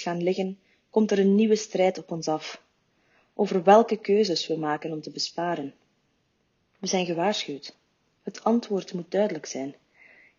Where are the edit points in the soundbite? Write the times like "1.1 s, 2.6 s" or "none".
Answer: none